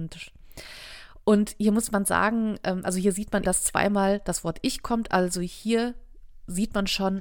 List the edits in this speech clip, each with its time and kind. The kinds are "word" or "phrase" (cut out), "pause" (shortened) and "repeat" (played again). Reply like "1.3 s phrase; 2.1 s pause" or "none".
3.4 s word